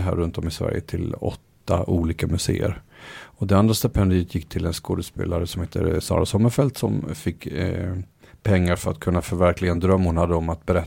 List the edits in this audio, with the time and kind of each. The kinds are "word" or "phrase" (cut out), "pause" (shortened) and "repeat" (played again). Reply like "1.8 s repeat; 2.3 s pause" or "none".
none